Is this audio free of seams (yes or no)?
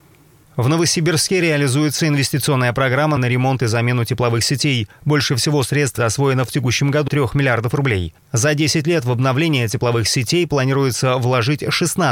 no